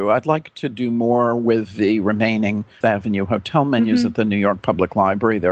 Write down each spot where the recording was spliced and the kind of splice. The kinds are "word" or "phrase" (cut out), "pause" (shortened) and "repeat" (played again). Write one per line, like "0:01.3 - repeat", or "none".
0:02.8 - word